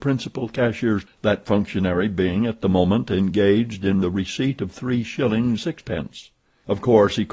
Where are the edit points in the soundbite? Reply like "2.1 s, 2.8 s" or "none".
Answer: 1.1 s, 4.0 s, 5.6 s